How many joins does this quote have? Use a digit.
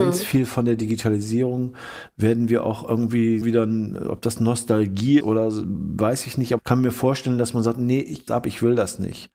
4